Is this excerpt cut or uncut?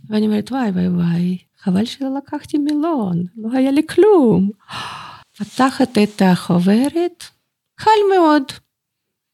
cut